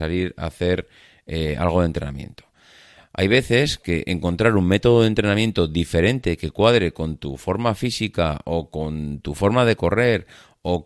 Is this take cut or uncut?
uncut